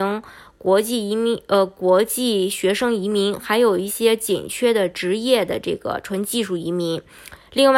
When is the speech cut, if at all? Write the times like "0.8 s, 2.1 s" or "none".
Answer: none